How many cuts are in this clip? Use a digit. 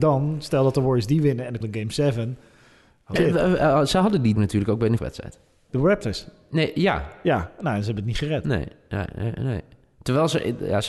4